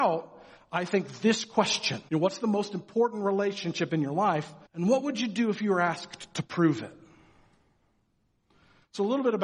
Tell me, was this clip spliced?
yes; 2 cuts; at 2.1 s, 4.7 s

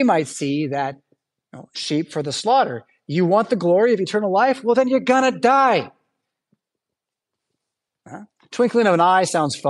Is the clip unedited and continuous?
yes; 0 cuts

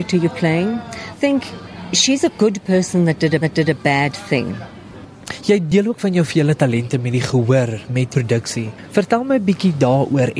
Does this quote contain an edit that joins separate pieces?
yes; 3 cuts; at 1.1 s, 3.4 s, 8.1 s

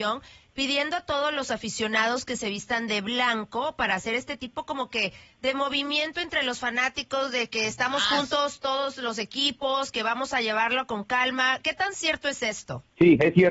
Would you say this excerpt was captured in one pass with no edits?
yes; 0 cuts

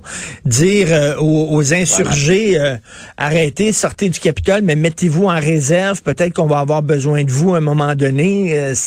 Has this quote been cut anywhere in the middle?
no; 0 cuts

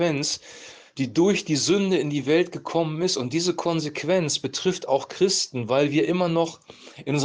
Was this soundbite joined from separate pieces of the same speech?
no; 0 cuts

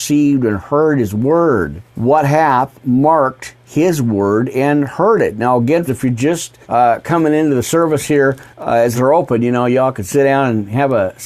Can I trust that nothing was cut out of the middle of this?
no; 5 cuts; at 1.9 s, 5.9 s, 6.6 s, 8.5 s, 8.9 s

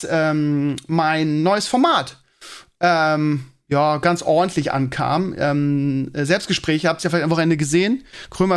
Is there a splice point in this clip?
no; 0 cuts

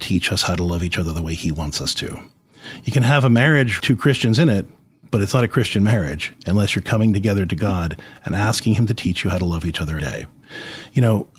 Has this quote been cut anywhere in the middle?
yes; 2 cuts; at 3.8 s, 10.0 s

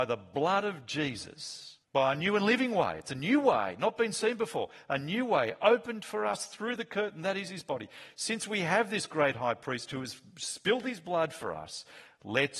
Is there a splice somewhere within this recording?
yes; 1 cut; at 1.8 s

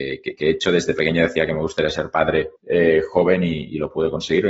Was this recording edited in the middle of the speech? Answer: yes; 1 cut; at 2.6 s

